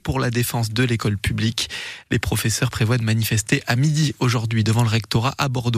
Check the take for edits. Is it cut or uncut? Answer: uncut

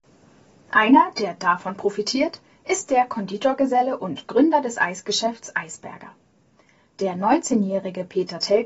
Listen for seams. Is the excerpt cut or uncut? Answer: uncut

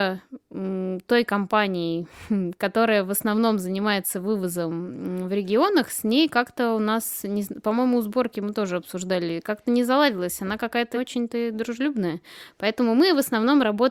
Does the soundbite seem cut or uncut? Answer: cut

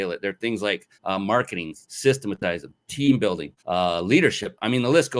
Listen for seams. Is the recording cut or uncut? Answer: cut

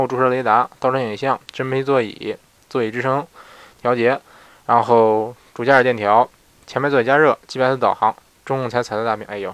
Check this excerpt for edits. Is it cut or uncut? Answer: uncut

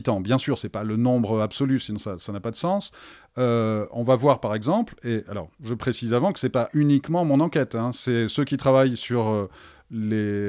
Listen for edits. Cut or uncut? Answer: uncut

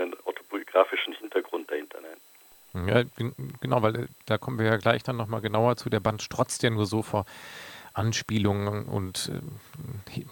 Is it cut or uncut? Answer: uncut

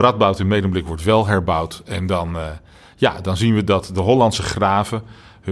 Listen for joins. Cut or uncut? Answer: uncut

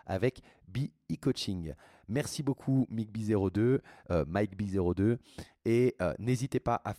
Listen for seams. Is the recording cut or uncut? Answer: uncut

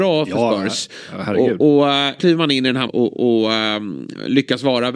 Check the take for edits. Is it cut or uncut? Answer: cut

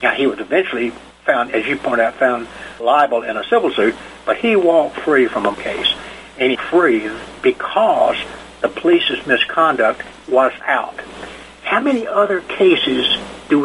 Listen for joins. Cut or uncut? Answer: cut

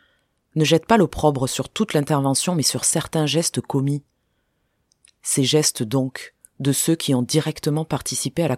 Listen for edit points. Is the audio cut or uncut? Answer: uncut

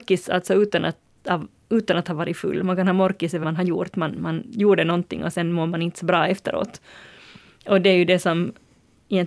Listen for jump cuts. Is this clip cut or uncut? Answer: cut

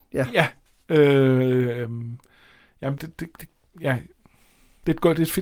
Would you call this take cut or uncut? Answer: cut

